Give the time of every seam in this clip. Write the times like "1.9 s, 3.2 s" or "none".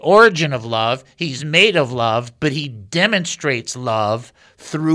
none